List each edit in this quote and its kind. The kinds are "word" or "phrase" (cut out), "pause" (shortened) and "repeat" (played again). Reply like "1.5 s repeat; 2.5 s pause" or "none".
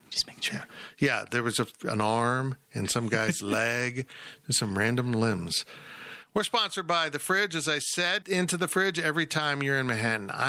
8.2 s word